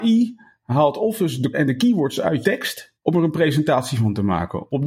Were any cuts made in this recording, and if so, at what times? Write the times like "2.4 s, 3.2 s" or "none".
1.5 s, 2.4 s, 3.0 s

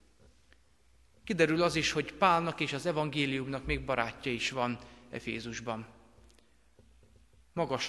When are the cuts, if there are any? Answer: none

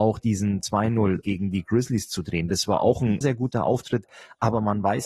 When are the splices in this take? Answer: 1.2 s, 3.2 s

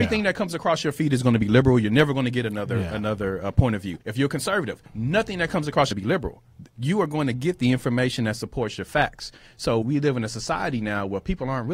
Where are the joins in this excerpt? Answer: 4.0 s, 4.9 s, 5.9 s, 6.7 s, 9.8 s

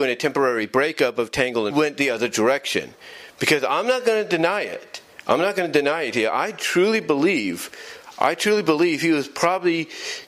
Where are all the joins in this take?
1.7 s

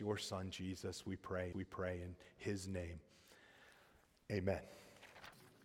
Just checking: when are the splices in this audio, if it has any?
1.5 s

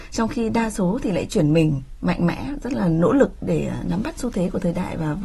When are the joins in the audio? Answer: none

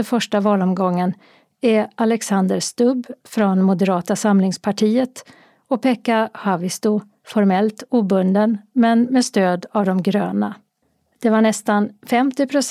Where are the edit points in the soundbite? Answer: none

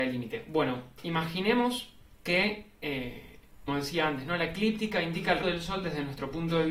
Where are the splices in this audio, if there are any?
2.2 s, 3.7 s, 5.4 s

